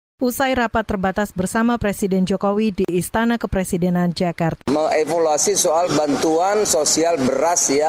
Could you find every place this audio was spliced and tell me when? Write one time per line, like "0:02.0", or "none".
0:04.6

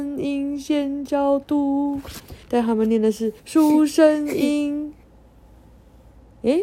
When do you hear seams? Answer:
0:02.4
0:03.4
0:05.0

